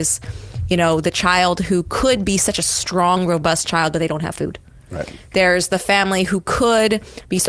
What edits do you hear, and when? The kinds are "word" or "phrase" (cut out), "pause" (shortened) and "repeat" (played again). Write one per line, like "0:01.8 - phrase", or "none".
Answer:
none